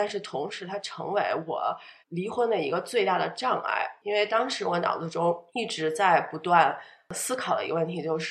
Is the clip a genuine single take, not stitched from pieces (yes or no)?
no